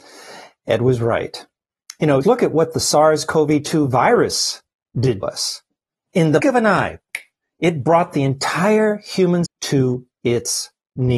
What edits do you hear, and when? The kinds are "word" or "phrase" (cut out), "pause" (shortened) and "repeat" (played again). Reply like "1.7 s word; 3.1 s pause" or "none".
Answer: 2.2 s word; 5.2 s word; 6.4 s word; 9.5 s word